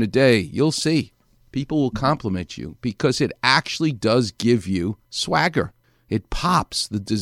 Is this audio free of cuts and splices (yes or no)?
yes